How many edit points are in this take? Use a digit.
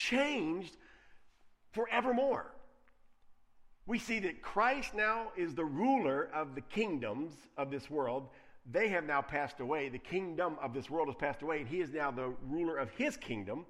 0